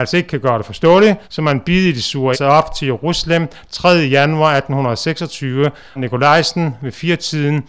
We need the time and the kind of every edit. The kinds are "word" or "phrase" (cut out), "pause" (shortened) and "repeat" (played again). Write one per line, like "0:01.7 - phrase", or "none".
0:01.2 - pause
0:02.3 - phrase
0:06.0 - word